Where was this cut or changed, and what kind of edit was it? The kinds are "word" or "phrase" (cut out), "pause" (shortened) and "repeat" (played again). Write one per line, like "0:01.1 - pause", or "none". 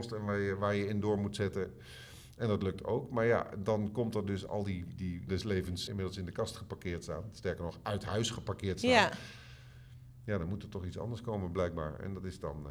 0:04.5 - word
0:04.9 - word
0:05.3 - phrase
0:05.9 - word